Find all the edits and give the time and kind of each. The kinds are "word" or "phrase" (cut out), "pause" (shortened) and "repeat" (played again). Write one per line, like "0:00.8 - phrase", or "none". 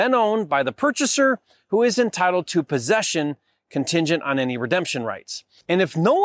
none